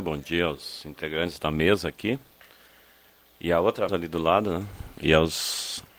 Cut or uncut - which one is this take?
cut